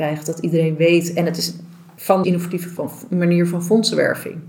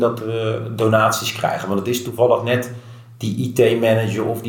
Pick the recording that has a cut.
first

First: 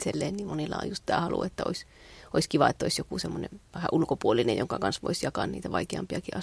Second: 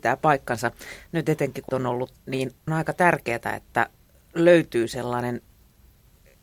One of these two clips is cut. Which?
second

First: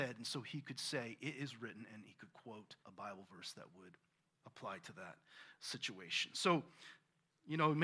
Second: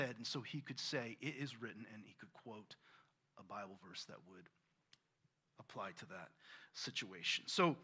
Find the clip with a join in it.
first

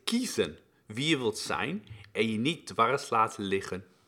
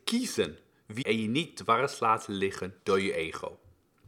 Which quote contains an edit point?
second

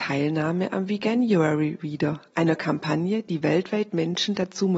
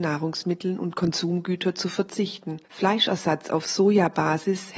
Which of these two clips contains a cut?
second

